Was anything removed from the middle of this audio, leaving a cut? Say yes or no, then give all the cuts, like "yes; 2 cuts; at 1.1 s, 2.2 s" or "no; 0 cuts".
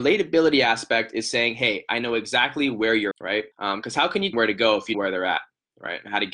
yes; 4 cuts; at 3.1 s, 3.5 s, 4.3 s, 4.9 s